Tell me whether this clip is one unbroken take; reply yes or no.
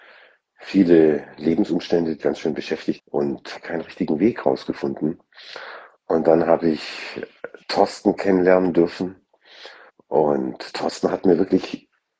no